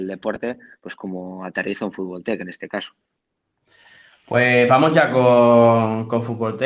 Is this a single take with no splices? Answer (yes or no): yes